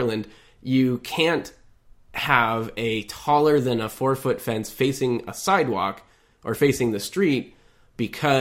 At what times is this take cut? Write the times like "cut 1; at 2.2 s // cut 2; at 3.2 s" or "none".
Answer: none